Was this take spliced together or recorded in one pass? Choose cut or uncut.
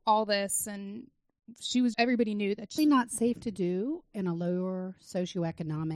cut